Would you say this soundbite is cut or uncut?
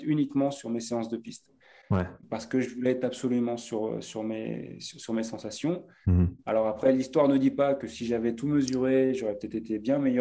uncut